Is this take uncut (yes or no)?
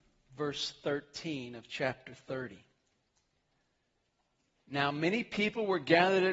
yes